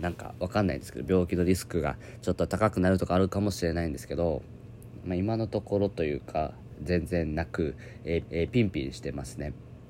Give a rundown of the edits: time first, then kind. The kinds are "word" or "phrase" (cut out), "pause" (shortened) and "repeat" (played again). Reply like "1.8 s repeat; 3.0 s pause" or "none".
8.3 s repeat